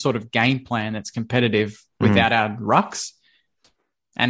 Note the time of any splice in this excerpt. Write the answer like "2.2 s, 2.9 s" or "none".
none

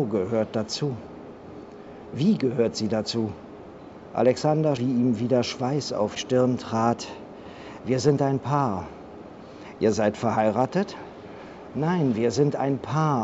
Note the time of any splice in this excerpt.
4.8 s, 6.2 s

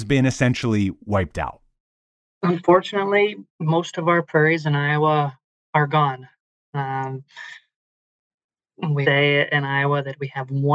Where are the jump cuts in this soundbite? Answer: 3.5 s, 9.0 s

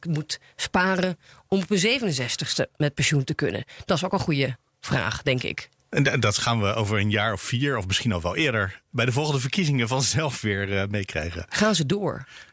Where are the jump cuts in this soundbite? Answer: none

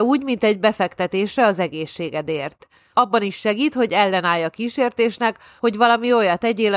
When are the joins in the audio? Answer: none

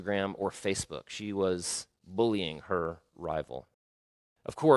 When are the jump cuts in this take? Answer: none

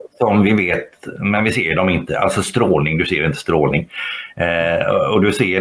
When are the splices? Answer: none

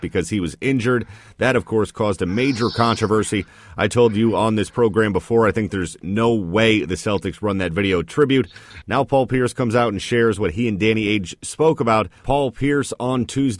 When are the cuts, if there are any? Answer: 12.2 s

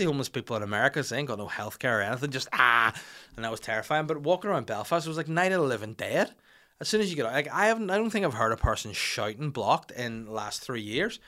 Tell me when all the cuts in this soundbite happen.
none

